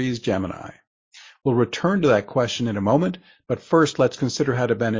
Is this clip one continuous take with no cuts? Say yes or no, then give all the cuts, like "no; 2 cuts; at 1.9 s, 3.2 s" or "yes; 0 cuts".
yes; 0 cuts